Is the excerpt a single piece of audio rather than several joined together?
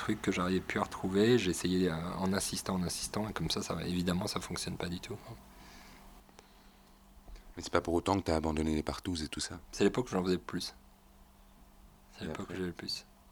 yes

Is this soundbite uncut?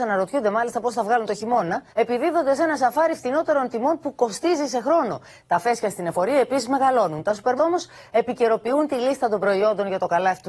no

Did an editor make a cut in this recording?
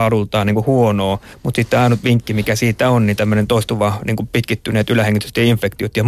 no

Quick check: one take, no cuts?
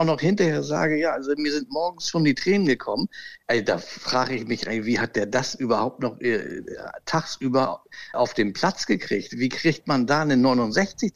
no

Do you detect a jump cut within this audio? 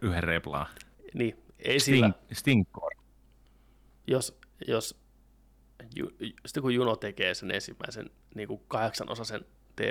yes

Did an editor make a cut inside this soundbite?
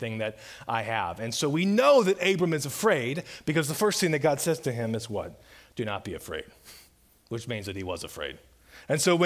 no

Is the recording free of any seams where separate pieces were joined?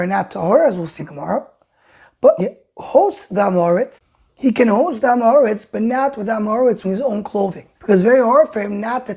no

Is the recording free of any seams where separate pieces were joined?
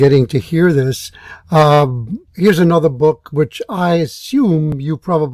no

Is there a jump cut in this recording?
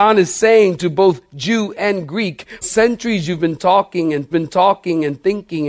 yes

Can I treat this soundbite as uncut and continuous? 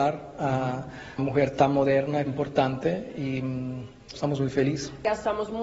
no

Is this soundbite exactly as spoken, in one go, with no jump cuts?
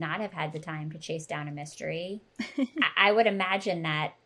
yes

